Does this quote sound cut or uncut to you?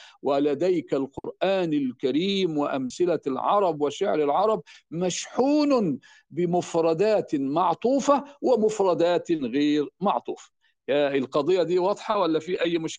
uncut